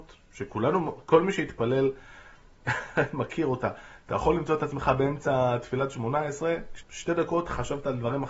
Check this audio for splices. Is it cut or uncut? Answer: cut